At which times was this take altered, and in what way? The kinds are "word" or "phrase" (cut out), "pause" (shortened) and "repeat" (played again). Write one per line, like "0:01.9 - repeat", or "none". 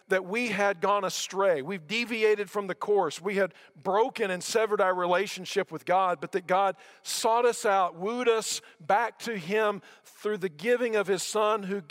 none